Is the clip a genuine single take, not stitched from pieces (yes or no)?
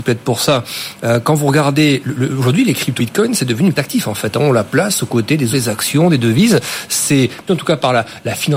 no